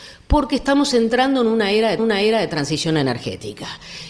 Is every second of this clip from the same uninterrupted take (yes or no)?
no